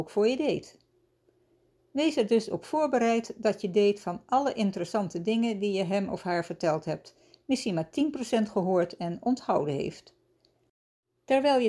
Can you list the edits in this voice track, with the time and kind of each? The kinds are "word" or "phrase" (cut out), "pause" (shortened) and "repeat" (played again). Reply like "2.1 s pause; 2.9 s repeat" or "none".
none